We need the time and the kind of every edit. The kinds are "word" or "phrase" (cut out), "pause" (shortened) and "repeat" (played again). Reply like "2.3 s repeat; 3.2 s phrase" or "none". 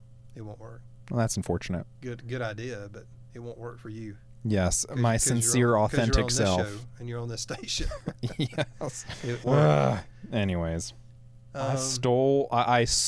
9.4 s phrase